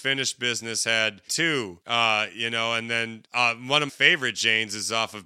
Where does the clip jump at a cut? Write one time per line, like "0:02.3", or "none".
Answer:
0:01.3
0:01.8
0:03.3
0:03.9

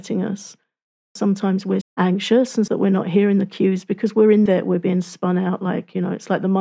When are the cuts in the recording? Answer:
0:01.8
0:02.7
0:04.5

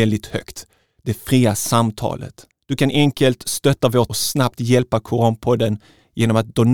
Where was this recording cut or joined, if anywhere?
0:02.5
0:04.1

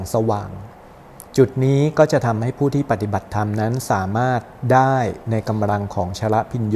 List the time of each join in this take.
0:01.3

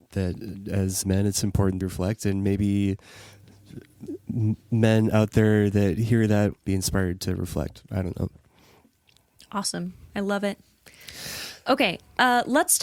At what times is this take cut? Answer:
0:01.0
0:01.8
0:06.5

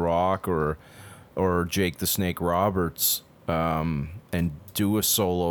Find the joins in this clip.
none

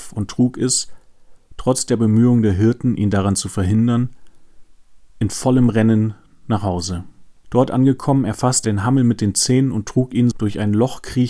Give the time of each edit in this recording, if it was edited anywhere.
0:08.6
0:10.3

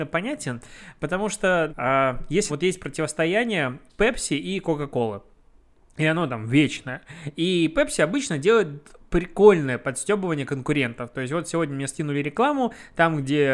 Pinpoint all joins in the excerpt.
0:01.7
0:02.5

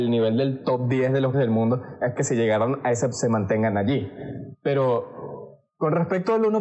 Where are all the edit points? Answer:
0:01.3
0:02.2
0:03.1

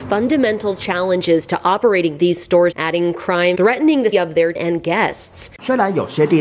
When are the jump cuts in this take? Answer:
0:02.7
0:03.5
0:04.1
0:04.6

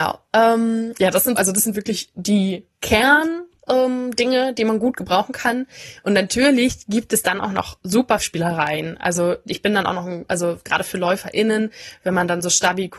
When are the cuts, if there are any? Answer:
0:01.3
0:02.7
0:08.2

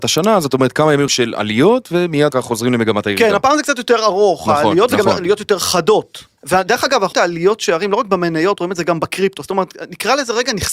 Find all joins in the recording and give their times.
0:01.1
0:02.3
0:06.4
0:07.1

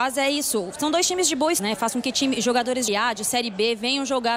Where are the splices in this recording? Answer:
0:01.6
0:02.9

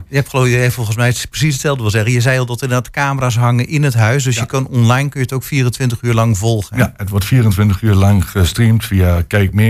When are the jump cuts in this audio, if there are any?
none

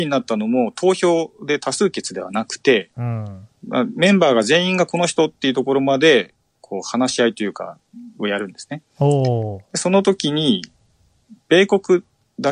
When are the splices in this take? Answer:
0:03.6

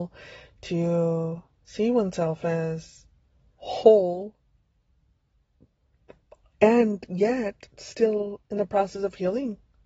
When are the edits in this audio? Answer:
none

